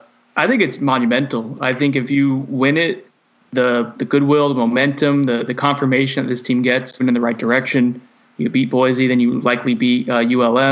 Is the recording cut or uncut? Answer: cut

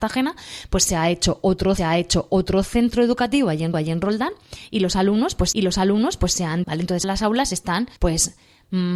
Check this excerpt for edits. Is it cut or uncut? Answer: cut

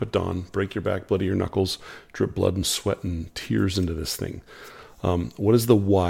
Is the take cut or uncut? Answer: uncut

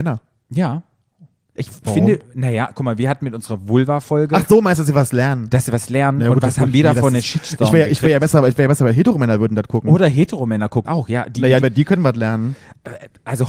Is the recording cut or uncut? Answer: cut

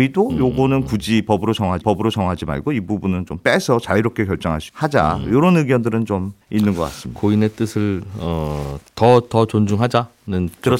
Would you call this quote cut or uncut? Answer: cut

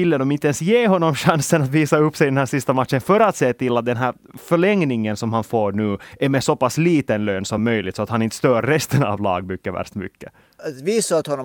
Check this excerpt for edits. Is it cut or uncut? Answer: uncut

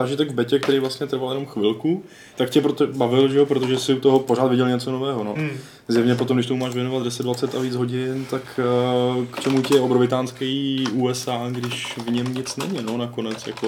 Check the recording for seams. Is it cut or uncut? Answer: cut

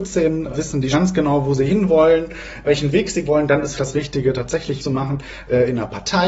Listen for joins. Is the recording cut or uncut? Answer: cut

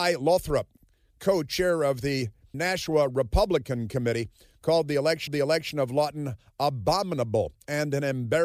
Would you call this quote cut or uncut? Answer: cut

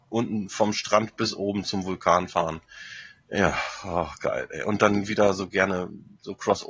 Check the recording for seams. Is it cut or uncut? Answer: uncut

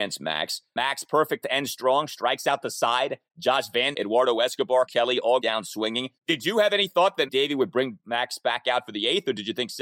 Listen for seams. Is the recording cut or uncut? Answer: cut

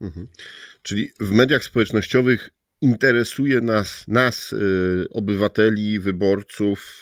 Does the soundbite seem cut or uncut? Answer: uncut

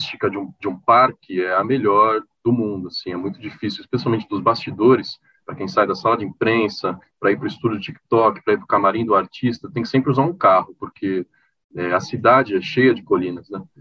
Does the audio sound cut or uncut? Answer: uncut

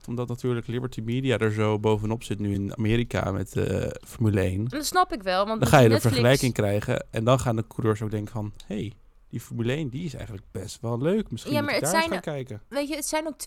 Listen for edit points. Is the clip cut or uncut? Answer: uncut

